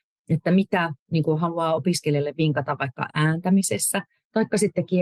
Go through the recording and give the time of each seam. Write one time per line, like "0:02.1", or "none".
none